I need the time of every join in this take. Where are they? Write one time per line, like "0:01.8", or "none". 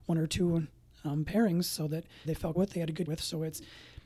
0:02.2
0:02.5
0:03.1